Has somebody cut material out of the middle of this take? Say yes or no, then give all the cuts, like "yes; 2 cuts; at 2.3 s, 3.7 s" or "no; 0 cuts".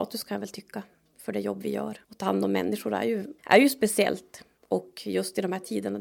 yes; 2 cuts; at 2.0 s, 3.4 s